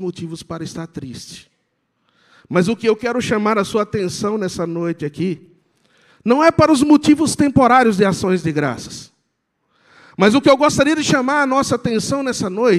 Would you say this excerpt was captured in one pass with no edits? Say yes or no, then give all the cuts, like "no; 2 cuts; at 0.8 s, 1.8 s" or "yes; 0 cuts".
yes; 0 cuts